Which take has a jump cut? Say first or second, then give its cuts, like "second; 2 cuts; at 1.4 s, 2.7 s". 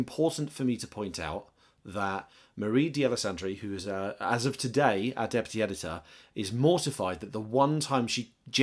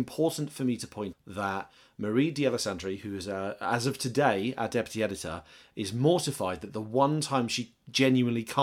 second; 1 cut; at 1.1 s